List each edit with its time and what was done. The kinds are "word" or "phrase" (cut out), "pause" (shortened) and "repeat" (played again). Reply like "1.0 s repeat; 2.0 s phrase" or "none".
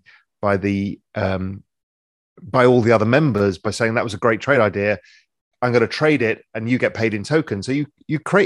none